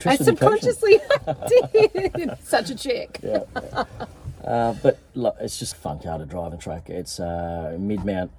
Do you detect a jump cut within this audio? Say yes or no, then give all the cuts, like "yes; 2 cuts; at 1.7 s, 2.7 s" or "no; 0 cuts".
yes; 2 cuts; at 5.7 s, 6.5 s